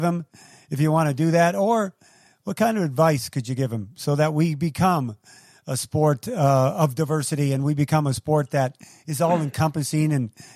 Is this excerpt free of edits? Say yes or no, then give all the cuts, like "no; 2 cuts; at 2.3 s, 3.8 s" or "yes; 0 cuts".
yes; 0 cuts